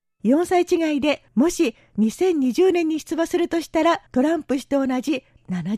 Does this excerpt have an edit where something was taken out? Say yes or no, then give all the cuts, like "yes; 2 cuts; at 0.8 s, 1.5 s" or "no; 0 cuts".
yes; 2 cuts; at 1.3 s, 4.1 s